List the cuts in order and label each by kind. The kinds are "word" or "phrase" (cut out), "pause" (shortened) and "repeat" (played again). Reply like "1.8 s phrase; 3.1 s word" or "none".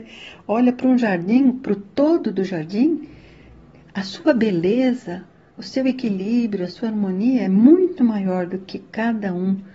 none